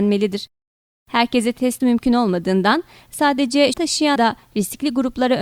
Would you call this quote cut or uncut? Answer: cut